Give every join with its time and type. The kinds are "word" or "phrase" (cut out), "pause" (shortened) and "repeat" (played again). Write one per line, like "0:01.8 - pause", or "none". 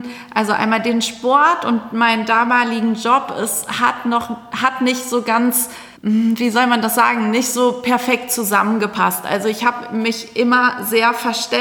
0:06.0 - pause